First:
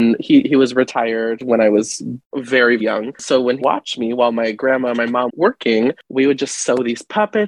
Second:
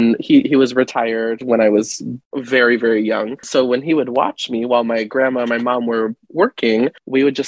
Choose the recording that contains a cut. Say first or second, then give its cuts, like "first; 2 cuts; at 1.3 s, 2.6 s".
first; 3 cuts; at 2.8 s, 3.6 s, 5.3 s